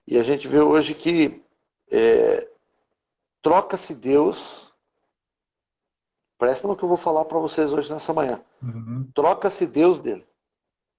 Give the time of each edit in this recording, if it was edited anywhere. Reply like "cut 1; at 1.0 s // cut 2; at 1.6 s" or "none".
cut 1; at 1.7 s // cut 2; at 6.6 s // cut 3; at 10.0 s